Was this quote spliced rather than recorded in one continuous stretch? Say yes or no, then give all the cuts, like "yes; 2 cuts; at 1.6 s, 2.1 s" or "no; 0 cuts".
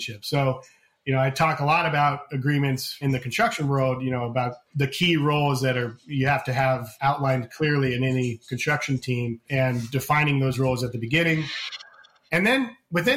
no; 0 cuts